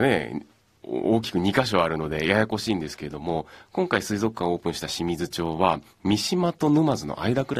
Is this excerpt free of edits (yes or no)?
yes